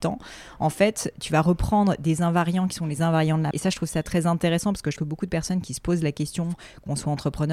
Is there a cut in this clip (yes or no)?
yes